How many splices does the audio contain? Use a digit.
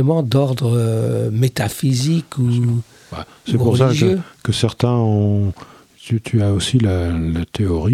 0